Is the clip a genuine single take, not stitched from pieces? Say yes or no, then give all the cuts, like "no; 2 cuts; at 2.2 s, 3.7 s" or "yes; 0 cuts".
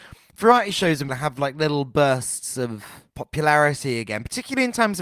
no; 2 cuts; at 1.1 s, 3.1 s